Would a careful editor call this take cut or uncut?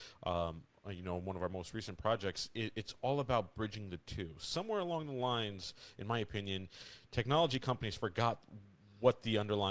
uncut